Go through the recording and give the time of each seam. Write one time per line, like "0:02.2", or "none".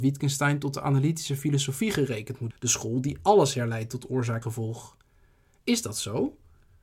0:02.5
0:04.4